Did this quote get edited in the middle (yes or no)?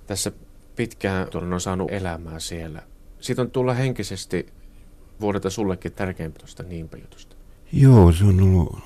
yes